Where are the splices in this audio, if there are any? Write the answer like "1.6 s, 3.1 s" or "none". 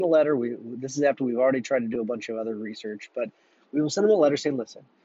none